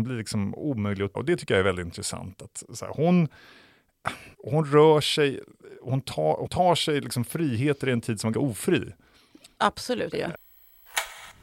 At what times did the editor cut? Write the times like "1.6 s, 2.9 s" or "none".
1.1 s, 4.3 s, 6.5 s, 8.3 s, 10.1 s